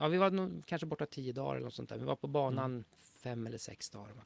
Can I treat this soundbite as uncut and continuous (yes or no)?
no